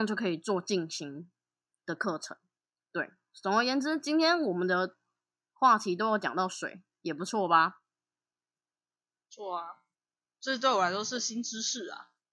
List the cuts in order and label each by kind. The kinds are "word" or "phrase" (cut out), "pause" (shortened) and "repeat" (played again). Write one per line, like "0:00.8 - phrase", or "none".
none